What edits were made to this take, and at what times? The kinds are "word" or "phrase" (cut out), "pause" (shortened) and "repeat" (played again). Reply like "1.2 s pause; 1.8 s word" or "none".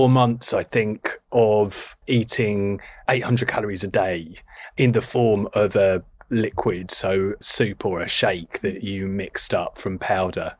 none